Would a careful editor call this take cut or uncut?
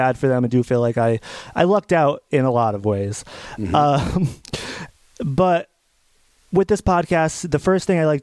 uncut